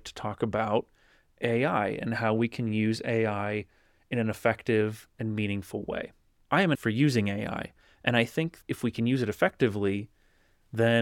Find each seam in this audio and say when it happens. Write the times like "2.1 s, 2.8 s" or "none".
6.7 s, 8.6 s